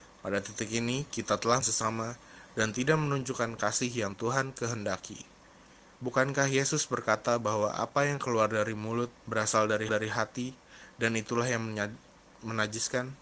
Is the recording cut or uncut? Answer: cut